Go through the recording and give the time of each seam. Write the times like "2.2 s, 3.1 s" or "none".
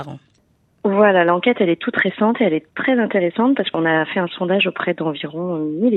none